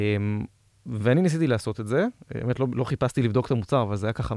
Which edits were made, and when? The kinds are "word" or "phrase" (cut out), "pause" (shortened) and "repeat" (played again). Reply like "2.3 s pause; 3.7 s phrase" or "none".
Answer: none